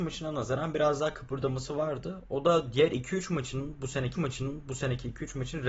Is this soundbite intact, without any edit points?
no; 1 cut; at 4.1 s

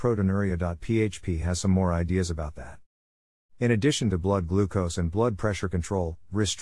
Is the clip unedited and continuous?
yes; 0 cuts

